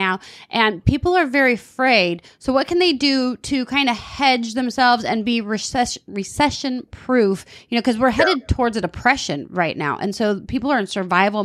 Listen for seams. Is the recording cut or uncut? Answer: uncut